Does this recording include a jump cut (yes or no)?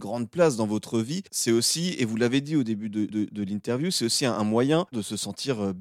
yes